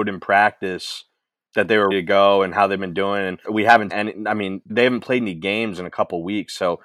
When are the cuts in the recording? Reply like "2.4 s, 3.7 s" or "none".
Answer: 1.5 s, 1.9 s, 3.4 s, 3.9 s, 4.7 s